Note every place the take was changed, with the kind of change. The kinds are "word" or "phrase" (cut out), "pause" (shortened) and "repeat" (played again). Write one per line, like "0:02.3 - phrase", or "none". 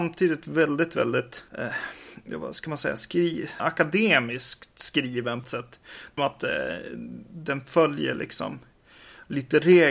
0:01.5 - pause
0:03.6 - word
0:05.4 - phrase
0:06.2 - phrase